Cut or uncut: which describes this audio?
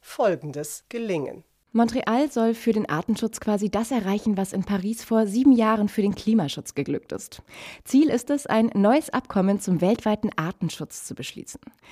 uncut